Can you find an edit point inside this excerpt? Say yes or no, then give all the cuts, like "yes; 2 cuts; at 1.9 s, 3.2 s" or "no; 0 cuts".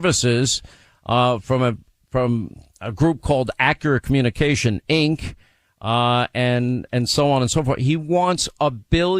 no; 0 cuts